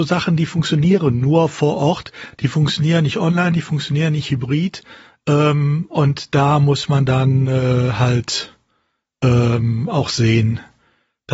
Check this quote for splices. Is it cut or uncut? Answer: uncut